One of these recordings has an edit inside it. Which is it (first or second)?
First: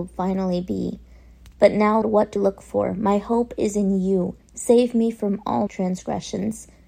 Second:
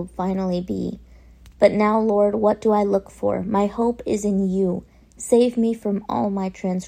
first